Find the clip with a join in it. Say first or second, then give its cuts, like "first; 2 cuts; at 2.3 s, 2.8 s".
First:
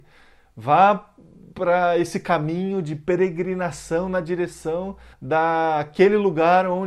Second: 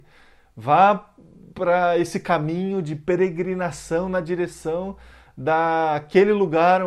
first; 1 cut; at 5.1 s